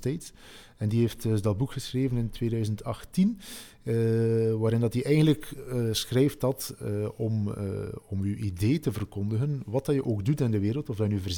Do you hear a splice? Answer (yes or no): no